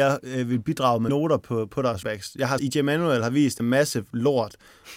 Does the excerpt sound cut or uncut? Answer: cut